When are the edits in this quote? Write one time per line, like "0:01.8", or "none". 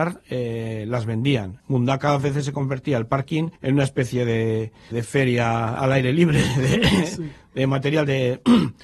0:01.6
0:03.6
0:04.9